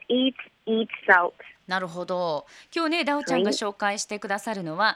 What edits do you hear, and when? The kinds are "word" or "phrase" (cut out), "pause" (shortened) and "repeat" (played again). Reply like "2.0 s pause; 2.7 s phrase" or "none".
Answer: 1.0 s word